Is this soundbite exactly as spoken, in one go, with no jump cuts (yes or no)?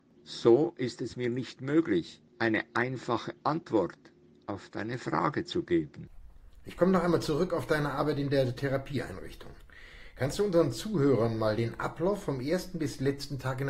yes